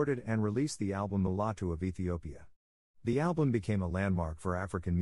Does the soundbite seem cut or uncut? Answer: uncut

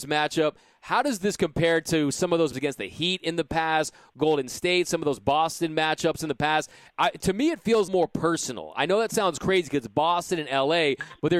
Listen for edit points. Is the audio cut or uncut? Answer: cut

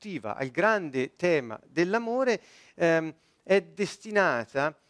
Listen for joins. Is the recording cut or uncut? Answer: uncut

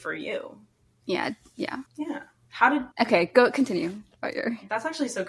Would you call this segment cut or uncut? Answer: cut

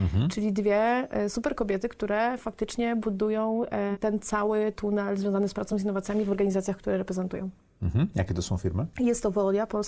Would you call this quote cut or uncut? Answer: uncut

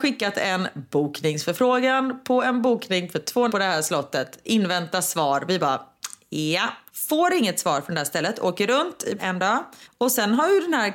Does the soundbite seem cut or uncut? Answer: cut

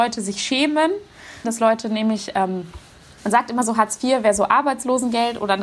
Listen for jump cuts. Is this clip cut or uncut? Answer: cut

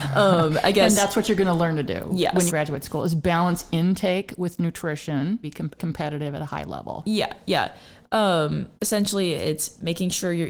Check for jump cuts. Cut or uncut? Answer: cut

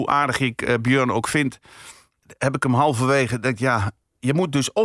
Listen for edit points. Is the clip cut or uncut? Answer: uncut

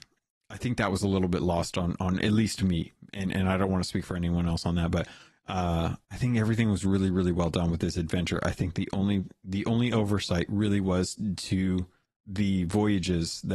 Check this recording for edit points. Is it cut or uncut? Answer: uncut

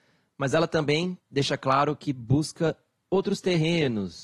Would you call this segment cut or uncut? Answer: cut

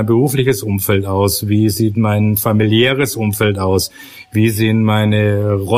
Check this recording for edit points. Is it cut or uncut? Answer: uncut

